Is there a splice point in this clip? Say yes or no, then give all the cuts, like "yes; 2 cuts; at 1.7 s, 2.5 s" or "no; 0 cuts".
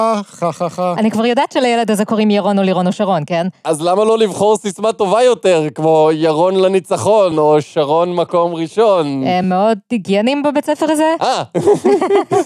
no; 0 cuts